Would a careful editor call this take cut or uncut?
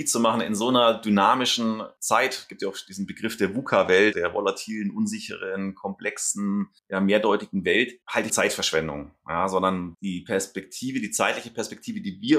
cut